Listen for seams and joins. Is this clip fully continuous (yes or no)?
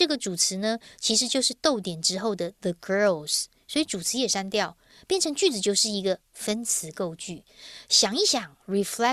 yes